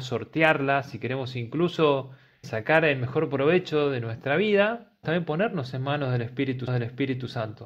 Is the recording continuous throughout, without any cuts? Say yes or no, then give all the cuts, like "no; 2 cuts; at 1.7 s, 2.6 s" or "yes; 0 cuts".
no; 3 cuts; at 2.4 s, 5.0 s, 6.7 s